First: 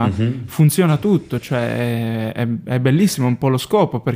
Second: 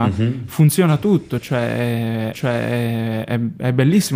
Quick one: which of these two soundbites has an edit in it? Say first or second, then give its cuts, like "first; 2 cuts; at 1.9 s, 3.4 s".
second; 1 cut; at 2.3 s